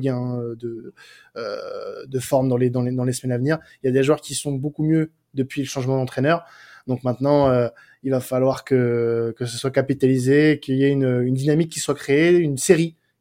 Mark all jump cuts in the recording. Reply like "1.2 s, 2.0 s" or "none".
none